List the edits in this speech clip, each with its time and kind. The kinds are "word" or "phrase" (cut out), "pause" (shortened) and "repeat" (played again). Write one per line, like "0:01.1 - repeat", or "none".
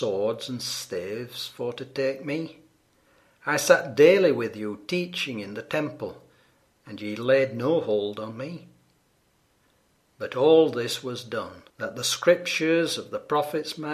0:11.7 - pause